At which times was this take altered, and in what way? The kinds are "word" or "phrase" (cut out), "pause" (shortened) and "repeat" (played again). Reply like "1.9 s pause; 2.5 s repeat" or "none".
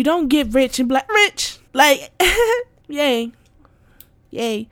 1.1 s phrase; 1.7 s pause; 2.8 s word